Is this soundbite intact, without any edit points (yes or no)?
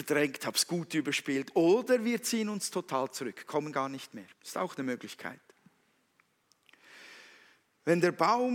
no